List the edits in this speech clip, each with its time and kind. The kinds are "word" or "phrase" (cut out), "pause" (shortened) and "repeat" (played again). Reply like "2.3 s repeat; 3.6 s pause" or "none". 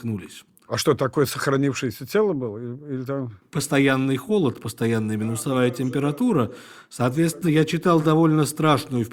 none